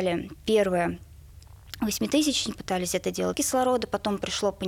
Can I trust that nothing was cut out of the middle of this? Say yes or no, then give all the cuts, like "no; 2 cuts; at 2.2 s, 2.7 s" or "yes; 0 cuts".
no; 2 cuts; at 2.5 s, 3.3 s